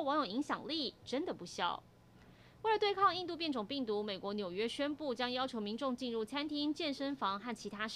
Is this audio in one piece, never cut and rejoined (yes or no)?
yes